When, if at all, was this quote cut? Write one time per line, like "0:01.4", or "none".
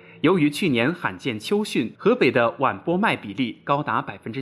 0:02.0